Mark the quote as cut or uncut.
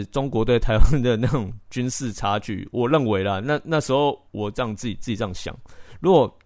cut